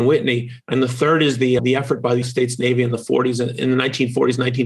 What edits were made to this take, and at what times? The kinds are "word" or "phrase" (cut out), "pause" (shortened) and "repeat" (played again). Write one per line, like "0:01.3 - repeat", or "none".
0:01.6 - word
0:02.2 - word